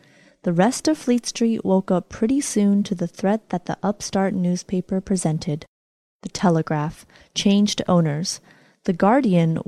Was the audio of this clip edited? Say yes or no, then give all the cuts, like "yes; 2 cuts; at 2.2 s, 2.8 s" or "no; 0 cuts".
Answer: no; 0 cuts